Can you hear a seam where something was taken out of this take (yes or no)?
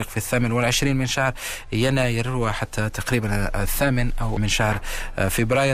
yes